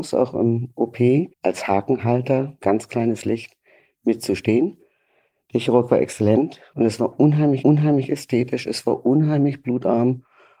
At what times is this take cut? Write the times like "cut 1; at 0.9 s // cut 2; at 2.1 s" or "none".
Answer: cut 1; at 1.3 s // cut 2; at 7.6 s